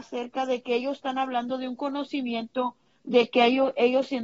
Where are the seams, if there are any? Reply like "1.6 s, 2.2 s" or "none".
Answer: none